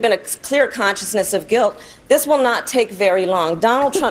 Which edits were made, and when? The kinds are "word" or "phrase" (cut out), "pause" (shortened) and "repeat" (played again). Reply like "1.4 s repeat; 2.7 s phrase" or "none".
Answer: none